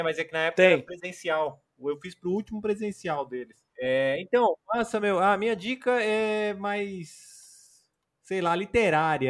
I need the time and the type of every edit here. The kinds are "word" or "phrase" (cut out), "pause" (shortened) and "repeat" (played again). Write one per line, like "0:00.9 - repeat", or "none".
none